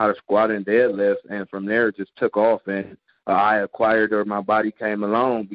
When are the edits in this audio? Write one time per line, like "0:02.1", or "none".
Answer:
none